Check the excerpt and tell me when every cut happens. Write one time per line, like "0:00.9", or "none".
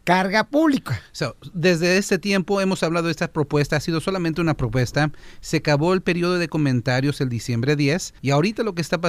0:08.2

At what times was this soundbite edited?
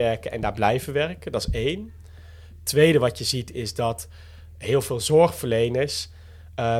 none

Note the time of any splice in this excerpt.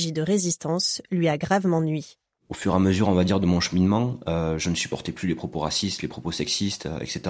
none

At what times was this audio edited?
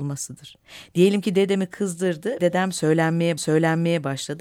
0:02.4
0:03.4

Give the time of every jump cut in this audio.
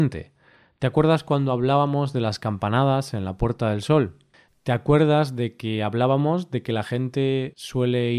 none

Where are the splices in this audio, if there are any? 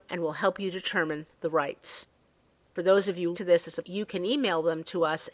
0:03.3
0:03.8

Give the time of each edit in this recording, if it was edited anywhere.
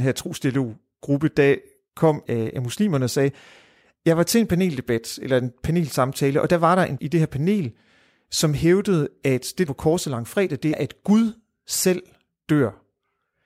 0:02.3
0:07.0
0:09.7
0:10.7

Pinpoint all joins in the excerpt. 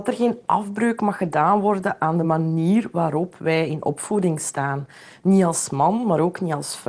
none

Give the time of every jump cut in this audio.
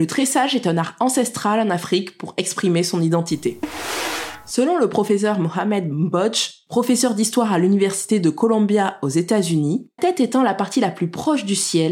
0:10.0

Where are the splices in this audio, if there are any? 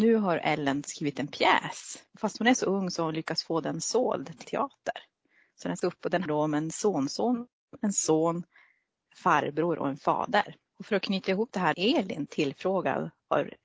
0:02.1
0:04.4
0:05.8
0:06.3
0:10.7
0:11.7

